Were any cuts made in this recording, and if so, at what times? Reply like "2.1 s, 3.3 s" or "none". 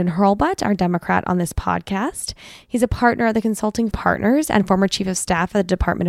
3.9 s